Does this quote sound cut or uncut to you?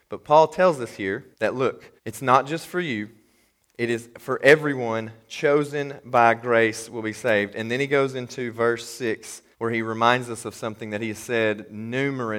cut